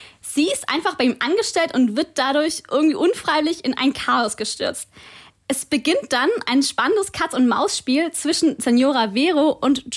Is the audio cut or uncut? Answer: uncut